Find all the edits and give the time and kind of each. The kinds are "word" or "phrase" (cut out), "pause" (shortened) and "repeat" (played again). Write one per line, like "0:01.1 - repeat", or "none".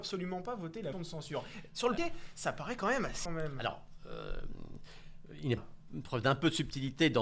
0:00.9 - word
0:02.0 - word
0:03.3 - phrase
0:05.6 - phrase